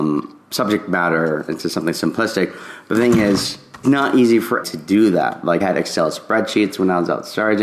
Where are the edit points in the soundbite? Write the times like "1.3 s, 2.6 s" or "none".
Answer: 1.5 s, 3.8 s, 4.6 s, 5.6 s